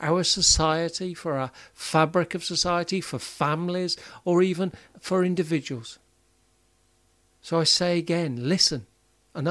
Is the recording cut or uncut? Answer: uncut